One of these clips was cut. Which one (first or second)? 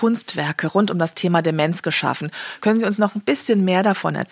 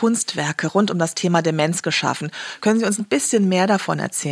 second